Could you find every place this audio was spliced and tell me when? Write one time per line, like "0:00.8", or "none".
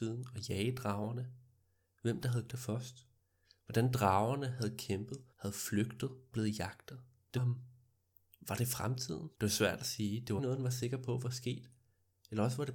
0:02.5
0:05.3
0:06.3
0:07.4
0:09.3
0:10.4